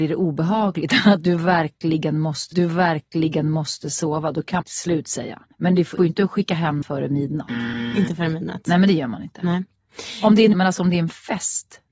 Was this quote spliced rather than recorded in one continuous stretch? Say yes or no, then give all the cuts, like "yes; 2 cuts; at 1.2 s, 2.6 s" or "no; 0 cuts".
yes; 6 cuts; at 2.5 s, 4.6 s, 5.5 s, 6.0 s, 6.8 s, 10.5 s